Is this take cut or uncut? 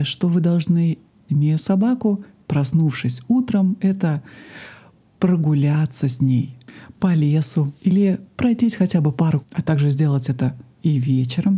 cut